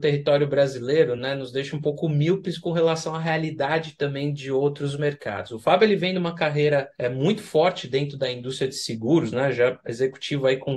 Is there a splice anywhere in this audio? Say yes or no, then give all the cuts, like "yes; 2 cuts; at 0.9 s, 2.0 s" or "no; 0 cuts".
no; 0 cuts